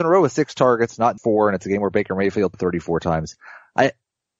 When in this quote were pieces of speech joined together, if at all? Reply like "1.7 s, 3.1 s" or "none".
1.2 s, 2.5 s

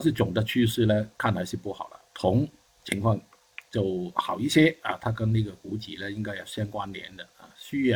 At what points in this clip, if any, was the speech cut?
2.1 s

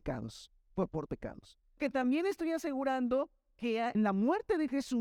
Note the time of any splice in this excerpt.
1.1 s, 1.8 s, 3.9 s

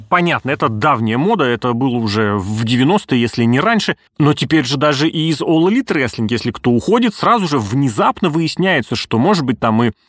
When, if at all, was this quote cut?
4.1 s

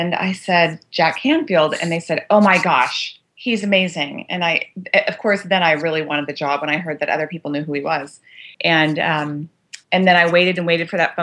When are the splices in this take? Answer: 3.3 s, 8.5 s, 9.8 s

